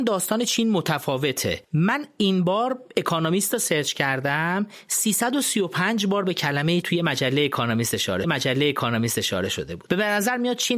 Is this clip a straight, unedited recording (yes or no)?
no